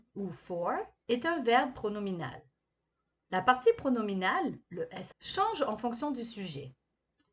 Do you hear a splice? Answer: yes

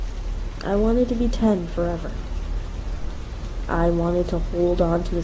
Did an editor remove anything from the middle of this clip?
no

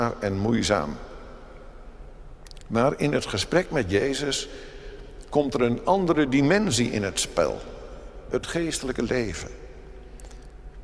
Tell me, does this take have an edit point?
no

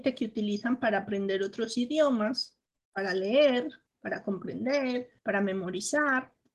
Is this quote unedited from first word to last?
no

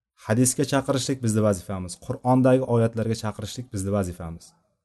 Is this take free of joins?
yes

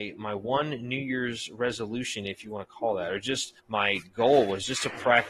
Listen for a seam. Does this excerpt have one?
yes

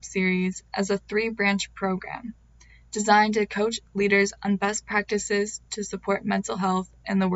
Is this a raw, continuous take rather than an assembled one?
yes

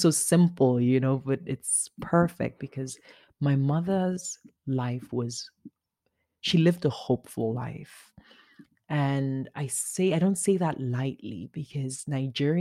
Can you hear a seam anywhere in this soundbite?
no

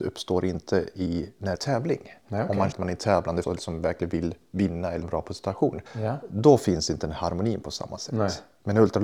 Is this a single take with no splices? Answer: no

